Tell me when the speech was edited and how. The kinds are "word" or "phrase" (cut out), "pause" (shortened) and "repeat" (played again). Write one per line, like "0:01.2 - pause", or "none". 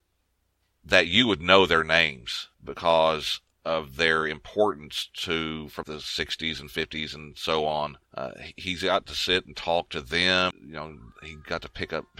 0:02.5 - pause
0:05.8 - word
0:08.0 - pause
0:10.5 - word